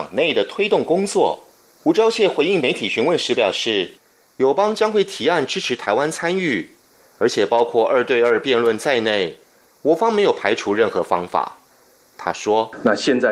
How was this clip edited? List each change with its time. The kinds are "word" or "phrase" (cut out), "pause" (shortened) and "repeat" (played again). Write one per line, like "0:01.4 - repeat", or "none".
none